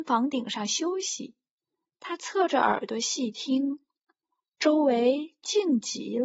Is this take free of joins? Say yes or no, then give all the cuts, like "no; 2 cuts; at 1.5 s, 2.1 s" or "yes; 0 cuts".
yes; 0 cuts